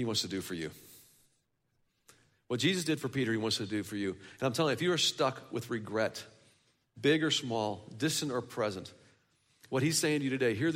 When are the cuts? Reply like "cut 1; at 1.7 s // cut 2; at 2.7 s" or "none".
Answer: none

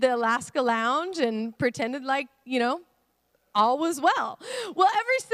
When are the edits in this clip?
none

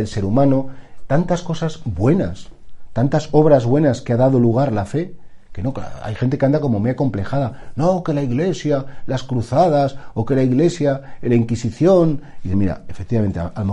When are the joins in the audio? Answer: cut 1; at 12.5 s

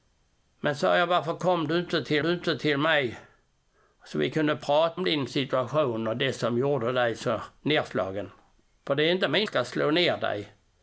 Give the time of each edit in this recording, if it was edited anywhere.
cut 1; at 2.2 s // cut 2; at 5.0 s // cut 3; at 8.6 s // cut 4; at 9.5 s

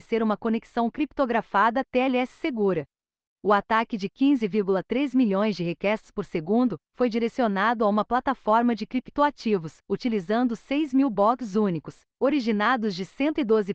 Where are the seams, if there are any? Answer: cut 1; at 9.8 s // cut 2; at 12.1 s

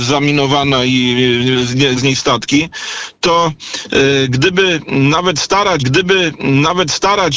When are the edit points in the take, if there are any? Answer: cut 1; at 2.0 s // cut 2; at 5.8 s

